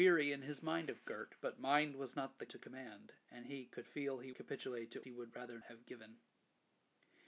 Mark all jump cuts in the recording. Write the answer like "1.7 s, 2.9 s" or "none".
2.5 s, 4.3 s, 5.0 s, 5.6 s